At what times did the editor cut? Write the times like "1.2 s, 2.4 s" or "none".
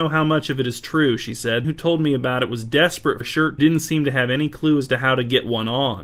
1.6 s, 3.2 s, 3.6 s